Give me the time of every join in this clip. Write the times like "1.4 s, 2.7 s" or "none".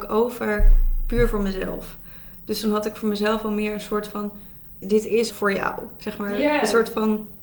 4.8 s, 5.3 s